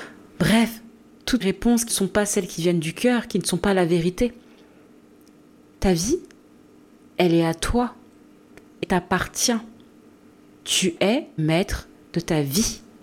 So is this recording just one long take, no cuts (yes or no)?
no